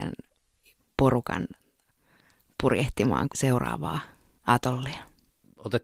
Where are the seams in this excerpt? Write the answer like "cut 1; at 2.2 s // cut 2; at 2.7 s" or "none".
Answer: cut 1; at 3.3 s